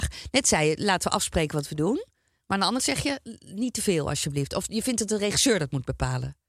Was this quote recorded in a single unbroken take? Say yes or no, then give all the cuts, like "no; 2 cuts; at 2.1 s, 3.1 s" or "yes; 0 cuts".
no; 1 cut; at 2.8 s